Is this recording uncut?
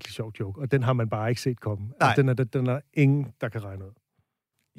yes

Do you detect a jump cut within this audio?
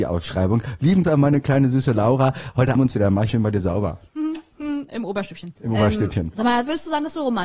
yes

